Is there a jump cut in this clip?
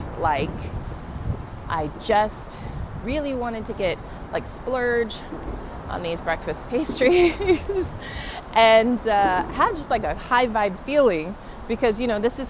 no; 0 cuts

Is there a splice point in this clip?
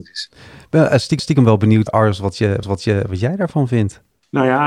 yes; 3 cuts; at 1.2 s, 1.9 s, 2.6 s

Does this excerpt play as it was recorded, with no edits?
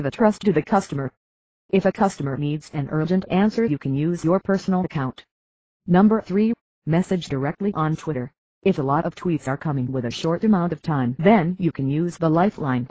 yes; 0 cuts

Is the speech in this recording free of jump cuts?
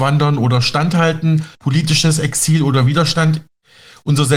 no; 1 cut; at 1.5 s

